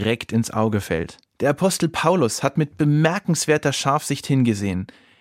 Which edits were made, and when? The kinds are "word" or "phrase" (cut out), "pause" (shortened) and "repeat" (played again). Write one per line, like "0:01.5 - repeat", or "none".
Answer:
0:01.2 - pause